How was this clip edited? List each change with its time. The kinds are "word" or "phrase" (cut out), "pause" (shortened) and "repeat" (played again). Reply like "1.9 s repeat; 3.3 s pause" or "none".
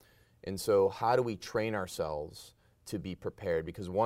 none